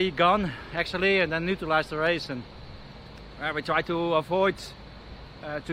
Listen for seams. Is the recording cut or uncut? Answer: uncut